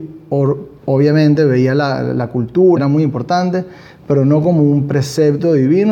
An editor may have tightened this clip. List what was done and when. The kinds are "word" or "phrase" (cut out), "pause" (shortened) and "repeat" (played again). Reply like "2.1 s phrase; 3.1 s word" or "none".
2.8 s phrase